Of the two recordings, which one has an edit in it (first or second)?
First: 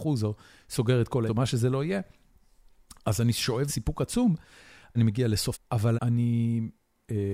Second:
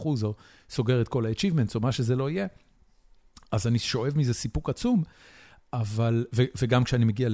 first